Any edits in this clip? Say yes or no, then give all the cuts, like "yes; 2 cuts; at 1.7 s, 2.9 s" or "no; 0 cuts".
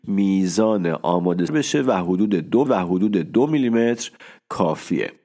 yes; 2 cuts; at 1.5 s, 2.7 s